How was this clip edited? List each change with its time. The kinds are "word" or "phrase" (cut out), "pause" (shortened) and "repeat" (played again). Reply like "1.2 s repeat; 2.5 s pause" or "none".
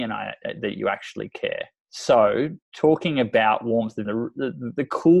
1.8 s pause; 4.0 s word